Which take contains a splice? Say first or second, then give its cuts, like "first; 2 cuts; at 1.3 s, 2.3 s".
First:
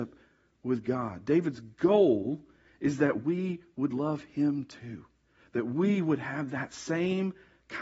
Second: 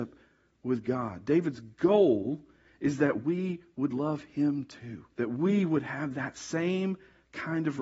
second; 1 cut; at 5.1 s